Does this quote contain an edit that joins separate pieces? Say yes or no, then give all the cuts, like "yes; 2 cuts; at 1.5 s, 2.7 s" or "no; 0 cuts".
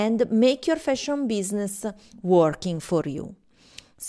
no; 0 cuts